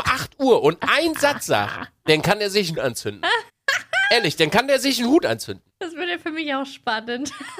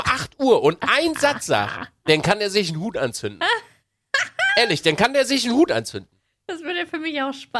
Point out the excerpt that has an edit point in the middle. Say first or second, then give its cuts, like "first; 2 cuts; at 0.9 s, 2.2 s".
first; 3 cuts; at 2.7 s, 3.5 s, 5.7 s